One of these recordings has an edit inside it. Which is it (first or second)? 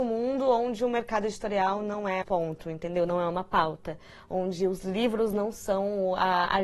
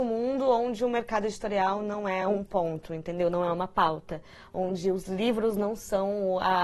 first